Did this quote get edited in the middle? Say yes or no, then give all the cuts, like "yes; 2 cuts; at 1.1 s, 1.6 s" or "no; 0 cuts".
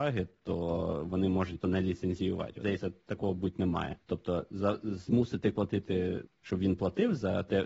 yes; 5 cuts; at 1.6 s, 2.6 s, 4.0 s, 5.5 s, 6.2 s